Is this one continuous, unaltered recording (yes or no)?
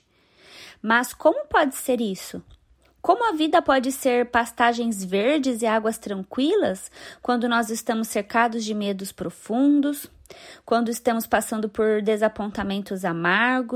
yes